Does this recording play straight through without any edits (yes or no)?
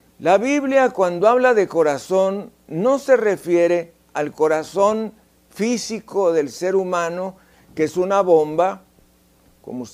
yes